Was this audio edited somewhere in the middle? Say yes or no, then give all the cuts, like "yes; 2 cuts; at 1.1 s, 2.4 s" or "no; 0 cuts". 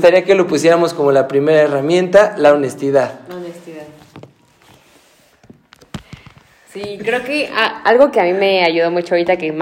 no; 0 cuts